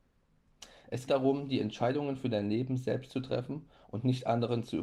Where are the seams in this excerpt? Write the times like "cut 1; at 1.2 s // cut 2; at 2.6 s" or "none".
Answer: cut 1; at 1.1 s

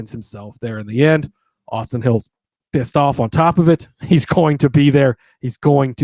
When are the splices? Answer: none

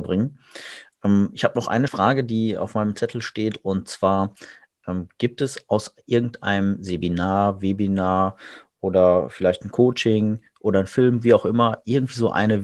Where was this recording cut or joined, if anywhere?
cut 1; at 1.9 s

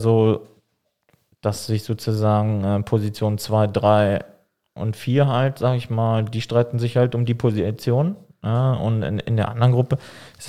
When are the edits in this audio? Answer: none

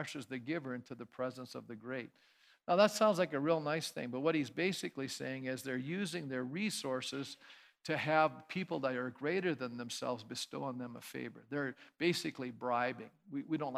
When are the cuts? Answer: none

